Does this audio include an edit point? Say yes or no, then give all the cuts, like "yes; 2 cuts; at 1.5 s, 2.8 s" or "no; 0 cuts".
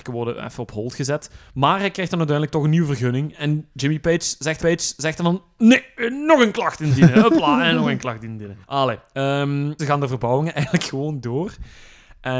yes; 3 cuts; at 4.6 s, 8.6 s, 9.8 s